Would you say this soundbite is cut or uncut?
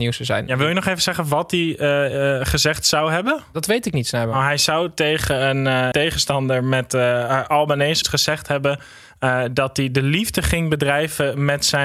cut